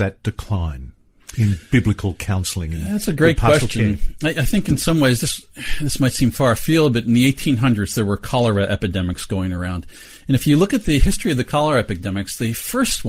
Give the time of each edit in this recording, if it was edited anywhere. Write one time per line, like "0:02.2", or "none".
none